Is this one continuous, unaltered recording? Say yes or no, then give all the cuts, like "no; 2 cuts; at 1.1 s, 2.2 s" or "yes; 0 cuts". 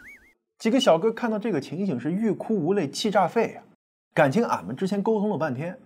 yes; 0 cuts